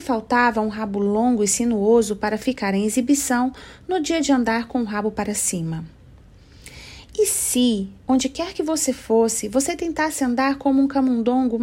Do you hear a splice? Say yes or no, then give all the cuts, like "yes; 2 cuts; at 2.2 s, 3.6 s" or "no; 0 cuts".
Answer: no; 0 cuts